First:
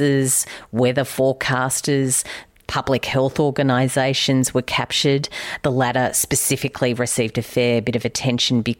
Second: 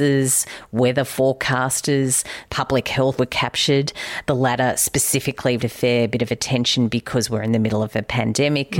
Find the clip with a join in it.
second; 3 cuts; at 2.5 s, 3.2 s, 5.6 s

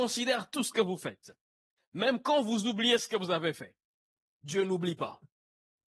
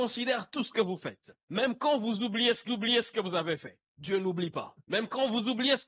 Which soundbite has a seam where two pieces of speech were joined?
second; 4 cuts; at 1.4 s, 2.7 s, 3.9 s, 4.8 s

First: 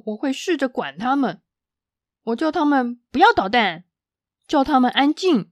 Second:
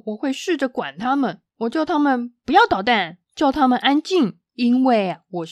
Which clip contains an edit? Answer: second; 3 cuts; at 1.5 s, 3.2 s, 4.5 s

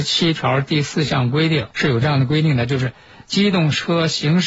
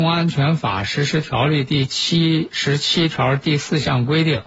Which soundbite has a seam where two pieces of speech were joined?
first; 1 cut; at 1.7 s

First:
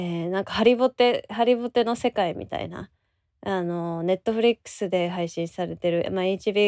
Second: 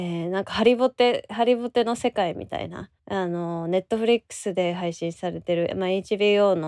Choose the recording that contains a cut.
second; 1 cut; at 3.0 s

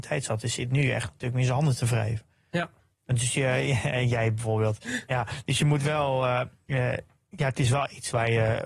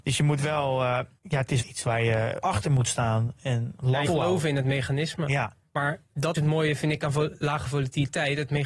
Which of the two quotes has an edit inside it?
second; 5 cuts; at 1.2 s, 1.6 s, 2.4 s, 4.1 s, 6.3 s

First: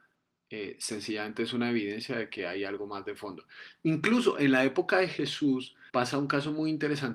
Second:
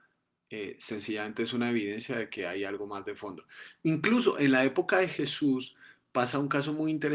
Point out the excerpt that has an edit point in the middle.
first; 1 cut; at 5.9 s

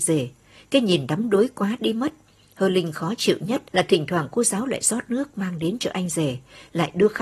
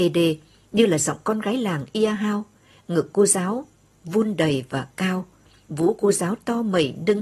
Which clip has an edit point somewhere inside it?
first; 1 cut; at 3.7 s

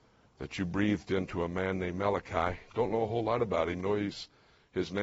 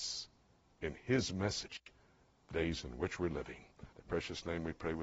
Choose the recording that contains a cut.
second; 2 cuts; at 2.5 s, 3.9 s

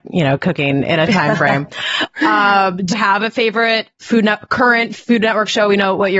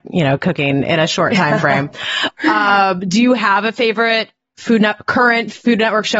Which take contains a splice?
first; 3 cuts; at 1.1 s, 2.9 s, 3.9 s

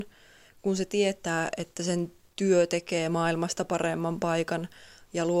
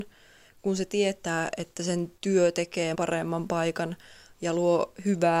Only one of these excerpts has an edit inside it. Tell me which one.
second; 2 cuts; at 2.2 s, 2.9 s

